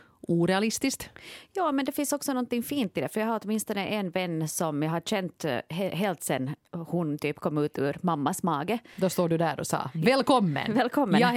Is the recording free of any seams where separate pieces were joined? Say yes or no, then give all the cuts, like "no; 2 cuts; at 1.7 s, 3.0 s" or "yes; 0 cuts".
yes; 0 cuts